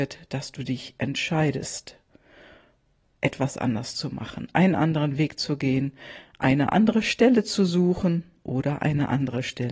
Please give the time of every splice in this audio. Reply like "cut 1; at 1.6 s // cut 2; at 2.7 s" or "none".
none